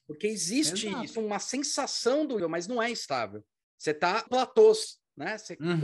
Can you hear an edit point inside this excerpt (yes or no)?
yes